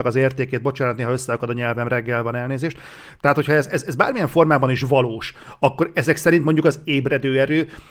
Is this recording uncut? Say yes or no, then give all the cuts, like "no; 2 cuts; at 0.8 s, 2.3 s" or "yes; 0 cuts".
yes; 0 cuts